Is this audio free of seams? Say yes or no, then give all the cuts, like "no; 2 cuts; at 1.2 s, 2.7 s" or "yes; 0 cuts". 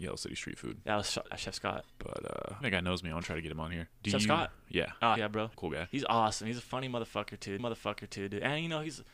no; 7 cuts; at 1.3 s, 1.9 s, 2.6 s, 3.9 s, 5.2 s, 5.5 s, 7.6 s